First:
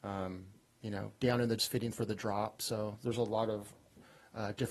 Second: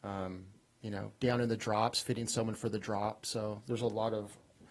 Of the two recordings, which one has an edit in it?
first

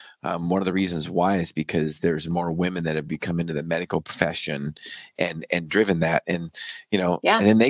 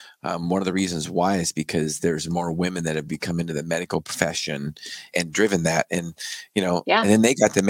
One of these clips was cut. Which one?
second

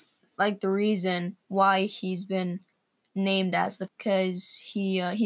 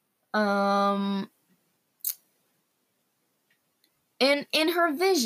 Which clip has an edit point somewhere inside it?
first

